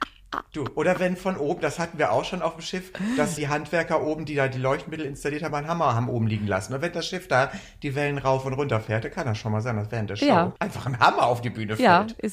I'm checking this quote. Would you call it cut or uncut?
cut